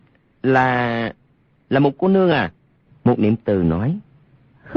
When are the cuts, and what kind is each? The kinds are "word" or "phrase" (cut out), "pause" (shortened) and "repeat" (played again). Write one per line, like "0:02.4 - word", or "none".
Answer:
none